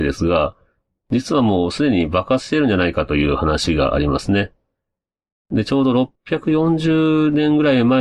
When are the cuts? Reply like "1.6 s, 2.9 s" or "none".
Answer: 6.2 s